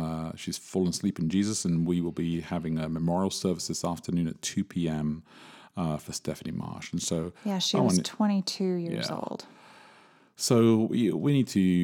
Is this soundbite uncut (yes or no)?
yes